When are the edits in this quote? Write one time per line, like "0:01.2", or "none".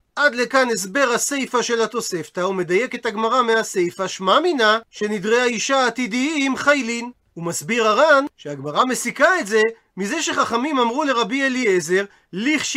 0:04.9
0:08.3